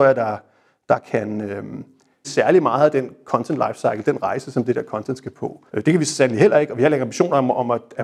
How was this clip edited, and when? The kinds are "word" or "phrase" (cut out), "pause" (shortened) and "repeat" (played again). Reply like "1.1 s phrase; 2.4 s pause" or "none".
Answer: 2.2 s phrase; 5.7 s pause